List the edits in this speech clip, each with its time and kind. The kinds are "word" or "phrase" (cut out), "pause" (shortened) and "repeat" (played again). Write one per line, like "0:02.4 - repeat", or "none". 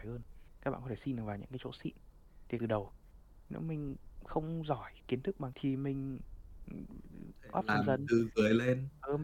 0:02.6 - phrase
0:05.5 - word
0:07.5 - word